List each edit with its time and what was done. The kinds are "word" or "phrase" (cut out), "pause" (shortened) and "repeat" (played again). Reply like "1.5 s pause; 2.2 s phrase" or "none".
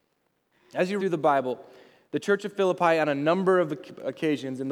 1.0 s word